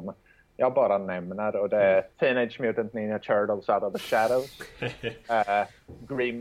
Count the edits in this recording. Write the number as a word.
one